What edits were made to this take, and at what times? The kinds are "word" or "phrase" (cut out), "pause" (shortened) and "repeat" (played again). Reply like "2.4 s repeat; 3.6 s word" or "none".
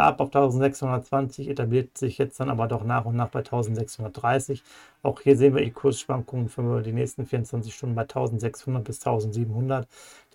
5.6 s word